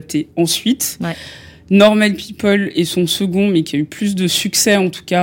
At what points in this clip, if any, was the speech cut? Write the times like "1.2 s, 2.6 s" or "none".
none